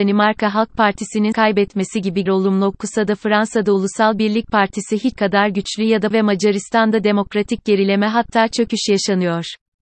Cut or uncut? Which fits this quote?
cut